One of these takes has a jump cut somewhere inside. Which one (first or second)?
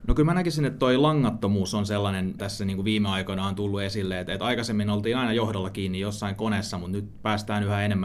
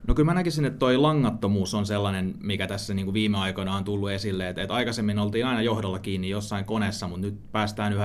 first